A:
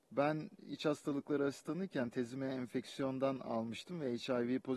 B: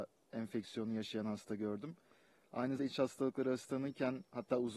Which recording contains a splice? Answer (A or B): B